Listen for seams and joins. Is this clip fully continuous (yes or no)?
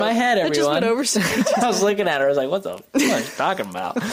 yes